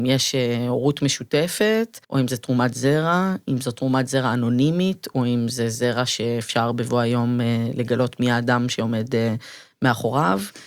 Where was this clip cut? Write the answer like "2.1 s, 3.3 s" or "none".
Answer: 2.0 s

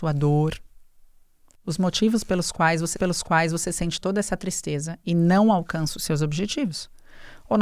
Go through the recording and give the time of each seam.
2.9 s

